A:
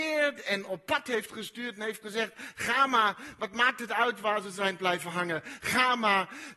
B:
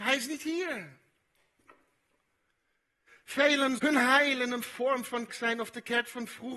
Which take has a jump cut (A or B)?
B